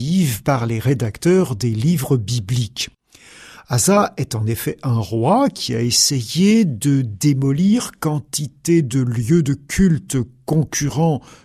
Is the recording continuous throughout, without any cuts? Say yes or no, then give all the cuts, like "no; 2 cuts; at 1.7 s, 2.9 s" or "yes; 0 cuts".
yes; 0 cuts